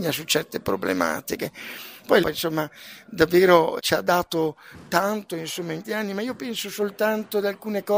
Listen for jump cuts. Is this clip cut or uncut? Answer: cut